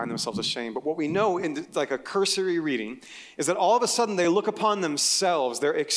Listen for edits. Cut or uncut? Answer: uncut